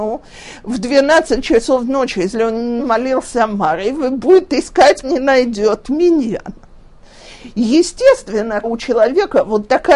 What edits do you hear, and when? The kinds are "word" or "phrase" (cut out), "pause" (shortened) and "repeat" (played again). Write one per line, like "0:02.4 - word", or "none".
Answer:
0:02.8 - word
0:05.0 - word
0:08.6 - word